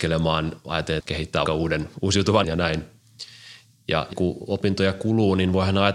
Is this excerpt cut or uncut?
cut